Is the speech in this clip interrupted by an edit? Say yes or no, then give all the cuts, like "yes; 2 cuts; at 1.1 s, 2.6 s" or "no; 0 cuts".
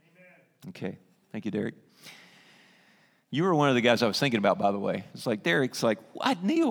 no; 0 cuts